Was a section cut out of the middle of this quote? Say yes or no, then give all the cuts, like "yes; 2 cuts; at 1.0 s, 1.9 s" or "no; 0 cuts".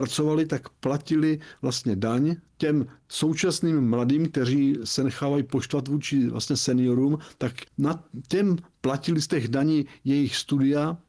yes; 2 cuts; at 2.5 s, 7.7 s